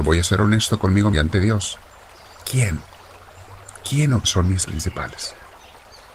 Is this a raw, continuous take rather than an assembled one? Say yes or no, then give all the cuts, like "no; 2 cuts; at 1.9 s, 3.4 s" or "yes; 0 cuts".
no; 3 cuts; at 1.1 s, 4.2 s, 4.6 s